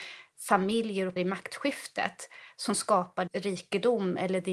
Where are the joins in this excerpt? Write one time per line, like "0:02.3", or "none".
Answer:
0:01.2
0:03.3